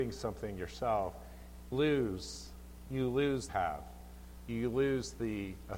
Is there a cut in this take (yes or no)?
yes